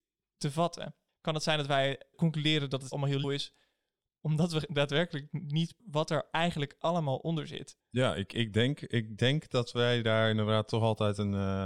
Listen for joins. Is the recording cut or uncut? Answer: cut